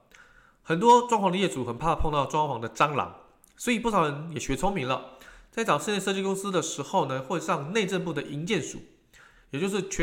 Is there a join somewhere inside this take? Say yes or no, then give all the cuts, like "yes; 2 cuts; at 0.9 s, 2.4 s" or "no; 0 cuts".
no; 0 cuts